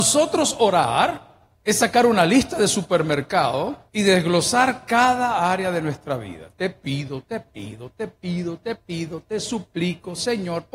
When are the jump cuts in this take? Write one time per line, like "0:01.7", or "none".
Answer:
0:01.5
0:03.9